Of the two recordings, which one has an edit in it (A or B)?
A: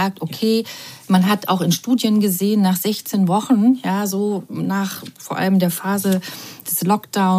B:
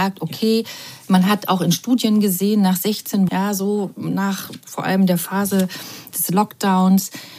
B